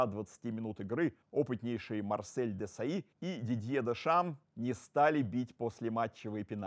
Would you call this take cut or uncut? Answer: cut